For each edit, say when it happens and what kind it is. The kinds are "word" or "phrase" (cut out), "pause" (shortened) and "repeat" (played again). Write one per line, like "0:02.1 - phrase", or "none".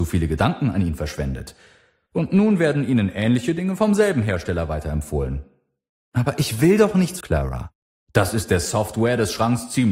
0:07.2 - phrase